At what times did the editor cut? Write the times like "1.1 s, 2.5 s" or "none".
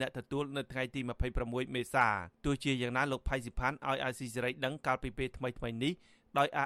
2.3 s